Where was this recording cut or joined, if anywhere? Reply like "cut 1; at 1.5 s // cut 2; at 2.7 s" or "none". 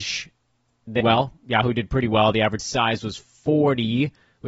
cut 1; at 1.0 s // cut 2; at 2.6 s